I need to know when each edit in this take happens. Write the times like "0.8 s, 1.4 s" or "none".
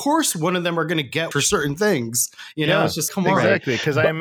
1.3 s, 3.1 s